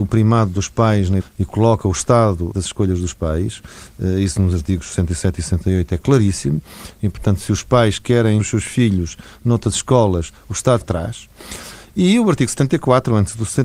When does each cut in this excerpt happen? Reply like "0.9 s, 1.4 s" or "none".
1.2 s, 2.5 s, 8.4 s, 10.8 s